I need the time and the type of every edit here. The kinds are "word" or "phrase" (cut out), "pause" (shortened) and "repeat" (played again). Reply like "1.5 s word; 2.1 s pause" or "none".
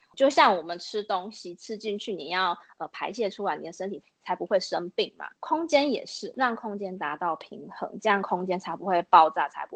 5.4 s pause